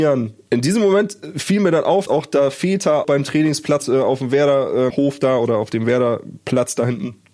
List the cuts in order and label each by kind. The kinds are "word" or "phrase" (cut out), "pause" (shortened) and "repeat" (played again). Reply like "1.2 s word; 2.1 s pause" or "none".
2.1 s word; 3.0 s word; 3.8 s word; 4.9 s word